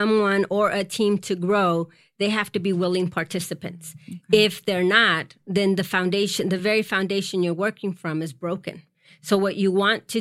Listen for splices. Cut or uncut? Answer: uncut